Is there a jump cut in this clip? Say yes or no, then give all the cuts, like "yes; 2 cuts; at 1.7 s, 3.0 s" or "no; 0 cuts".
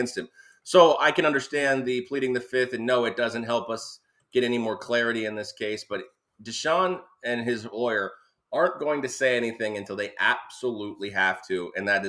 no; 0 cuts